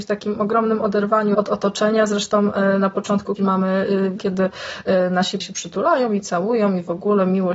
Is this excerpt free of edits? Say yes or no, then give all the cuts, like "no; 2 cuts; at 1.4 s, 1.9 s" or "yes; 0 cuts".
no; 4 cuts; at 1.3 s, 3.4 s, 4.2 s, 5.4 s